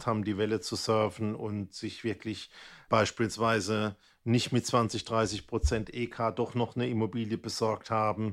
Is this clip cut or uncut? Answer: cut